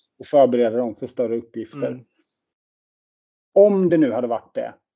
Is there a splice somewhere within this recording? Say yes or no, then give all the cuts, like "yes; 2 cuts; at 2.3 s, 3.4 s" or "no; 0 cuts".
no; 0 cuts